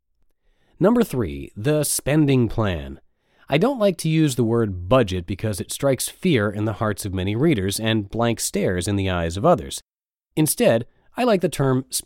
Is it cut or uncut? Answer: uncut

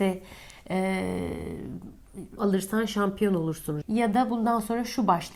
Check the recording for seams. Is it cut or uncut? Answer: cut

